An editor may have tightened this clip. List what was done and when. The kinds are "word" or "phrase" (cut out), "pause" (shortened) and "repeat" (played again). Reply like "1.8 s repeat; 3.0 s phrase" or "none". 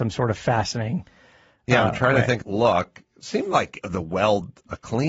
2.4 s phrase